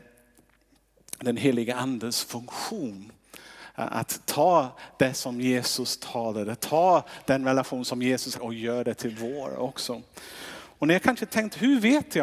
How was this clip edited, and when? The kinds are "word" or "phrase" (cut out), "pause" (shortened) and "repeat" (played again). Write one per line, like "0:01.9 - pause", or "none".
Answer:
0:08.3 - phrase